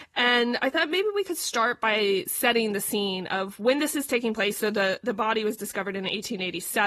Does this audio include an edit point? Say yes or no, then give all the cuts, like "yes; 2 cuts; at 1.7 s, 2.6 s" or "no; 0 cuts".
no; 0 cuts